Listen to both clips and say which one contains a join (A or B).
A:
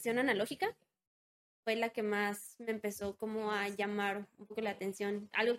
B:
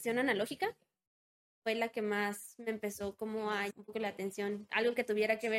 B